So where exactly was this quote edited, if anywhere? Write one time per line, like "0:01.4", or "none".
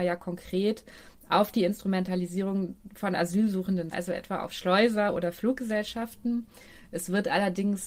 0:03.9